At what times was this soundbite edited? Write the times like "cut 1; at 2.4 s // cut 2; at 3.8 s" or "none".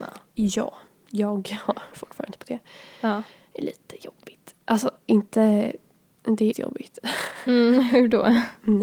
cut 1; at 1.9 s // cut 2; at 6.5 s